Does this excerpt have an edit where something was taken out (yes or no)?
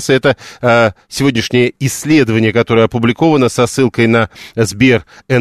no